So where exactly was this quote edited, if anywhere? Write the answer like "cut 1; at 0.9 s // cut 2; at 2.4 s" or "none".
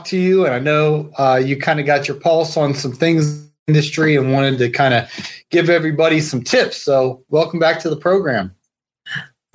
cut 1; at 3.6 s